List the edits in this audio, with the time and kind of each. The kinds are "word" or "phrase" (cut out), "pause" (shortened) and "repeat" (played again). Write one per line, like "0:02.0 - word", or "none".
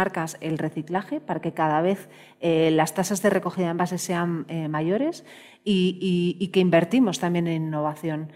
none